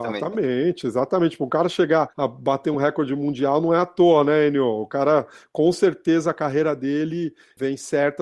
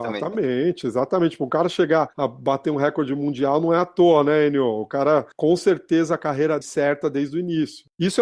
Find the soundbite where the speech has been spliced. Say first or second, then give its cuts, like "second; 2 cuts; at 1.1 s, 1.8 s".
second; 2 cuts; at 5.3 s, 6.6 s